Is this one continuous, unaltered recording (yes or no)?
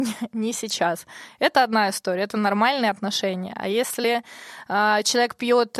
yes